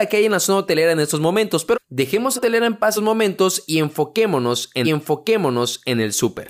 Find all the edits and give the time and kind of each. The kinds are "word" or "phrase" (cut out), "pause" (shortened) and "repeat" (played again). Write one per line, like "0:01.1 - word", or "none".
0:01.7 - word
0:02.4 - phrase
0:03.0 - phrase
0:04.8 - repeat